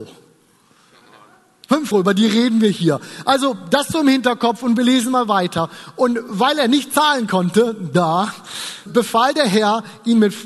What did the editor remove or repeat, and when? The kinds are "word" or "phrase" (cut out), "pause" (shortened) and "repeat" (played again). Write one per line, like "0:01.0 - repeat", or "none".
0:01.9 - phrase
0:08.9 - word